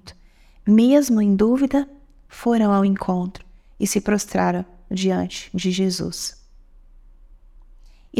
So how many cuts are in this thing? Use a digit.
0